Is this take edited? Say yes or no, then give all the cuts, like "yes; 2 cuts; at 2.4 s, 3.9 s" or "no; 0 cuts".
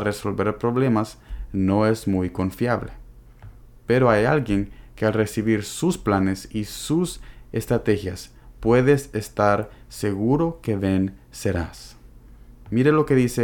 no; 0 cuts